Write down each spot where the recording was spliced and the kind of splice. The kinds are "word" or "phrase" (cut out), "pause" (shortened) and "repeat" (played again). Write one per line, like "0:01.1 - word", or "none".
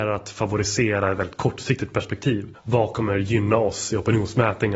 0:02.5 - pause